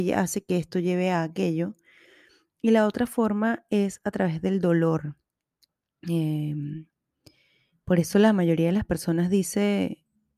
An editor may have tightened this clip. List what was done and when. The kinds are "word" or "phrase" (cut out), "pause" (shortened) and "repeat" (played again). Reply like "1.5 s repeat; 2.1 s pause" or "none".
none